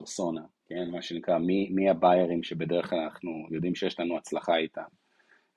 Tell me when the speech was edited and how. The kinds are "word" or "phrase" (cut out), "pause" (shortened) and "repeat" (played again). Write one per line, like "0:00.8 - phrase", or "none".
none